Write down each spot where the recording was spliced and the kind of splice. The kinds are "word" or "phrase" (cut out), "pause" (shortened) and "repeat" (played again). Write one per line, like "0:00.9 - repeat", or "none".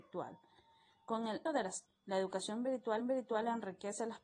0:01.5 - word
0:01.9 - word
0:03.0 - repeat